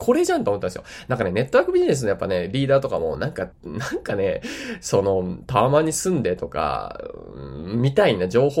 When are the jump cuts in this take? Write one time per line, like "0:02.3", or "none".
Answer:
0:03.5